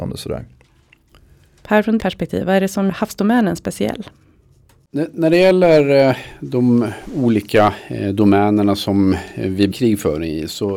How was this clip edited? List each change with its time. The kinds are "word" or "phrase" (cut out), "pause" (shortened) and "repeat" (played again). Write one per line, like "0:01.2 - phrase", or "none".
0:02.0 - word
0:02.9 - word
0:09.7 - word